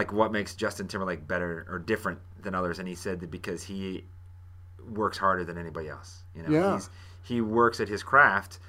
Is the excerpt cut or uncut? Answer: uncut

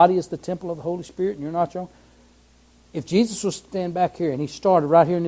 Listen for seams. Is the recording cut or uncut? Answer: uncut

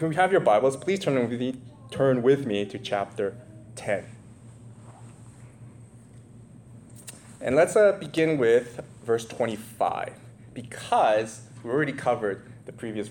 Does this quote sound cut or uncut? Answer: uncut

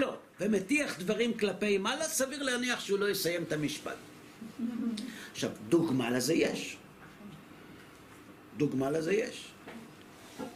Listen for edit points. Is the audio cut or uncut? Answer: uncut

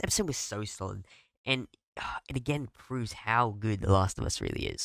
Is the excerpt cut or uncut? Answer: uncut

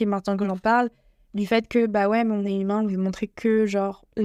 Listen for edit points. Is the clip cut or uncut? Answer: uncut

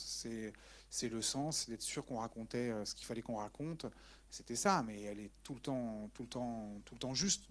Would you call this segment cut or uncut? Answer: uncut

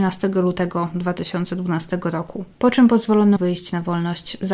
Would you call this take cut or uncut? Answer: cut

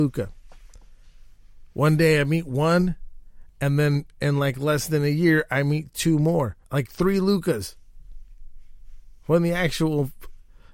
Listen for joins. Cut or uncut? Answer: cut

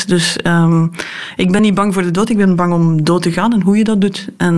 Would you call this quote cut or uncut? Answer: uncut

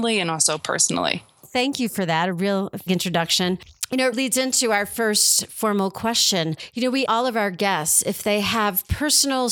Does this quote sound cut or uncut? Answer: cut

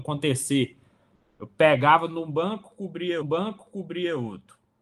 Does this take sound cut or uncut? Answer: cut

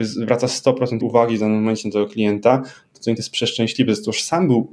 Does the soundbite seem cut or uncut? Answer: cut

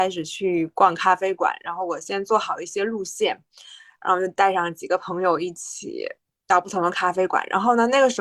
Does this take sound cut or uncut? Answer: uncut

